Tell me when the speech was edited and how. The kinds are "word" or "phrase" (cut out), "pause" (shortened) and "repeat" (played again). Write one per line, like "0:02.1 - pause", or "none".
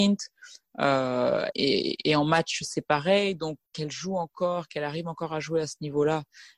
0:01.5 - word
0:03.7 - pause